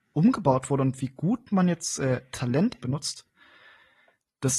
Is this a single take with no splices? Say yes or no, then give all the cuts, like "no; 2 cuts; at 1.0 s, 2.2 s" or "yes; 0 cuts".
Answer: no; 1 cut; at 2.8 s